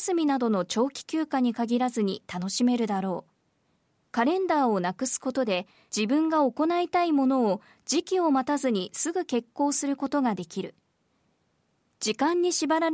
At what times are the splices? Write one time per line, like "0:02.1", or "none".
none

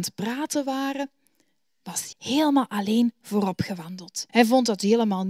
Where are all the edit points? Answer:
0:02.1
0:04.3

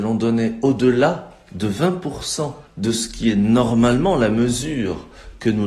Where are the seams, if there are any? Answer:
0:02.7

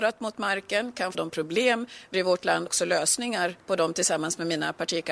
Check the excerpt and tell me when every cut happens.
0:01.1
0:02.1
0:02.7
0:03.6

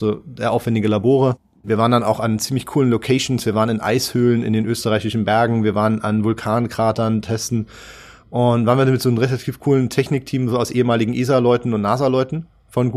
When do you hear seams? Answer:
none

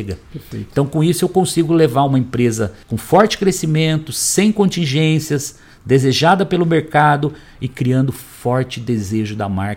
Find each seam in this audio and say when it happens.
0:02.8

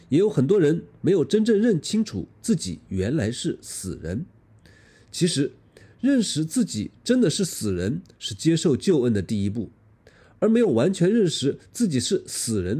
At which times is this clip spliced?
none

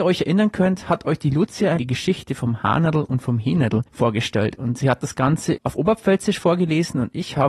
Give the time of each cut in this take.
0:01.8
0:03.9

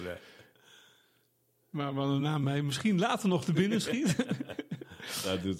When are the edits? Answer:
none

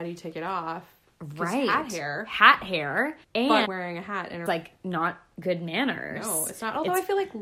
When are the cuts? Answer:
0:03.2
0:03.6
0:04.5

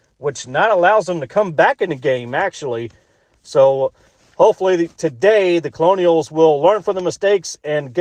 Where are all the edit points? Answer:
none

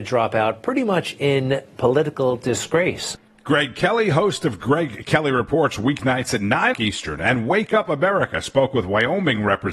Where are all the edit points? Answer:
0:06.7

